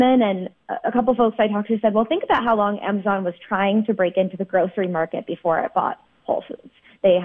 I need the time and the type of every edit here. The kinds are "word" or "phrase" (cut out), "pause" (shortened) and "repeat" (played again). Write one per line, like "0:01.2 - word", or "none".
none

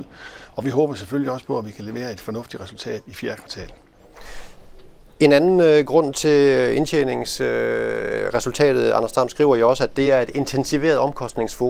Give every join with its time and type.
none

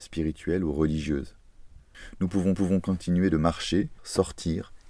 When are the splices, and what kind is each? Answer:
0:02.6 - repeat
0:04.0 - word

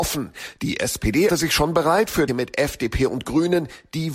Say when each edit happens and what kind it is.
0:01.3 - word
0:02.3 - word

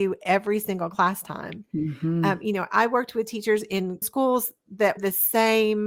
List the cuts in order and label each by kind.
0:04.0 - word
0:05.0 - word

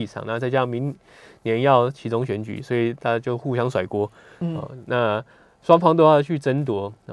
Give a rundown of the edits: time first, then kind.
none

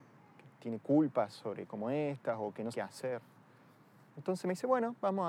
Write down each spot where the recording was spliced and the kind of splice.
0:01.7 - word
0:02.7 - word

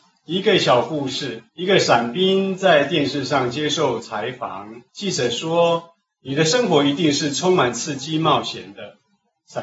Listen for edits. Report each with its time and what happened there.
0:01.5 - pause
0:04.9 - pause

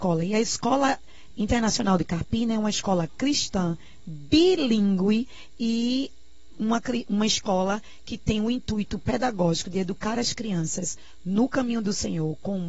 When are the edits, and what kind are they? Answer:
none

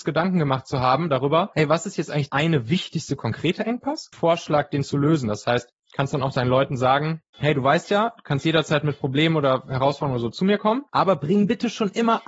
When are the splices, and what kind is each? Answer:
0:02.3 - word
0:04.1 - phrase

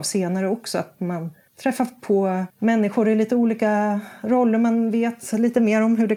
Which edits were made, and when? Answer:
0:01.5 - pause
0:02.5 - pause

